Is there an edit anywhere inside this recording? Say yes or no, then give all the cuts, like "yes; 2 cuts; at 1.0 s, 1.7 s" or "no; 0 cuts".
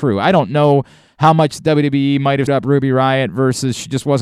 yes; 1 cut; at 2.5 s